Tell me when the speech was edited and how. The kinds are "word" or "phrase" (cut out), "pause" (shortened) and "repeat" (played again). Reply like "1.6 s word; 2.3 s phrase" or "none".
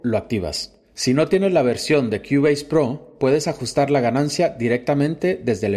none

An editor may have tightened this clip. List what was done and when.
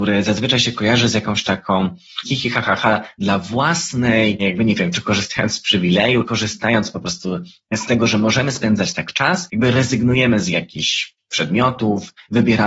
2.2 s word; 2.8 s word; 4.4 s word; 6.3 s word

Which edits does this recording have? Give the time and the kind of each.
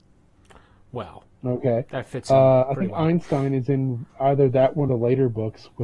1.9 s pause; 4.1 s pause; 4.9 s phrase

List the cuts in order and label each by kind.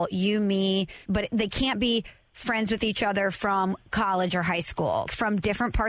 1.0 s pause

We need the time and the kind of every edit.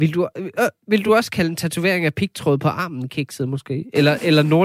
none

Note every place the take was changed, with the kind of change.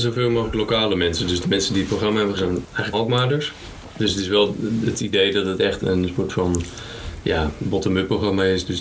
2.4 s word; 2.9 s word; 5.8 s word

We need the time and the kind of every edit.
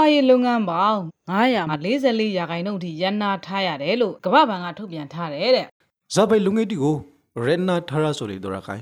5.8 s pause

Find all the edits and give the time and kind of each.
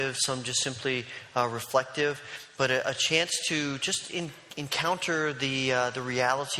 none

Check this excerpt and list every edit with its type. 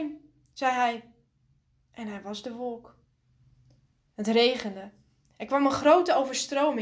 none

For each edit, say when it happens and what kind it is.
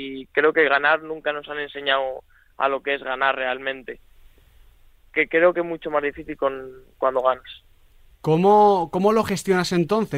none

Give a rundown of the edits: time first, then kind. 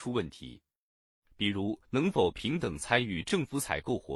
1.8 s pause

